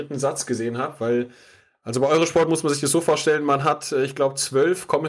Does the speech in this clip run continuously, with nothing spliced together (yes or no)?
yes